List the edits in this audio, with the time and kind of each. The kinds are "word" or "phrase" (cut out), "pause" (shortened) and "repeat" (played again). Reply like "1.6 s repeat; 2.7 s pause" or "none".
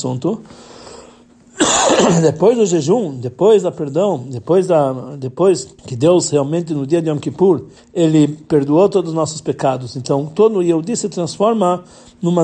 5.8 s pause; 7.8 s pause